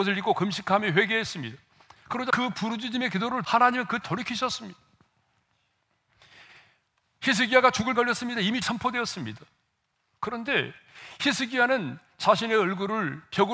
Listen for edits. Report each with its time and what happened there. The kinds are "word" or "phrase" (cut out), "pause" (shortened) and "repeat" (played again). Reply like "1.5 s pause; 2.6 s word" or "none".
2.3 s word; 3.4 s word; 4.0 s word; 8.0 s word; 8.6 s word